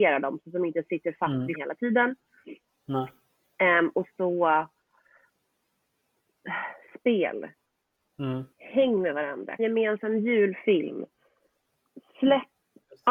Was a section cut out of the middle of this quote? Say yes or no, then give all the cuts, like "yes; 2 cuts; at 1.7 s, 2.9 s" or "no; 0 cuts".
yes; 5 cuts; at 1.5 s, 4.1 s, 7.0 s, 8.5 s, 9.6 s